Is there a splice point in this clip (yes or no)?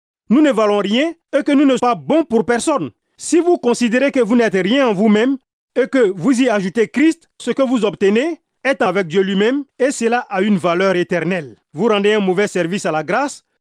yes